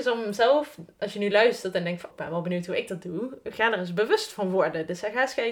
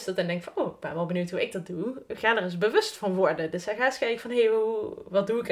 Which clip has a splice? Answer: first; 1 cut; at 2.1 s

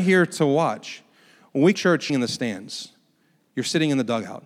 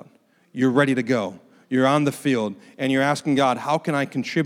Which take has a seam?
first; 2 cuts; at 1.7 s, 2.1 s

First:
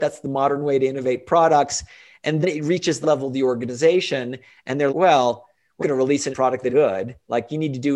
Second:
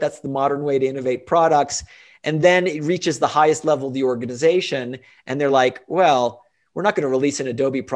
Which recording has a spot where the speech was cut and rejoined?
first; 6 cuts; at 2.4 s, 3.0 s, 4.9 s, 5.8 s, 6.3 s, 6.7 s

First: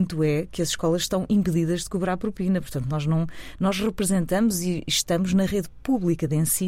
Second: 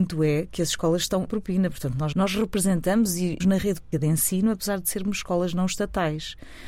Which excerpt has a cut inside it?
second; 4 cuts; at 1.3 s, 2.1 s, 3.4 s, 3.9 s

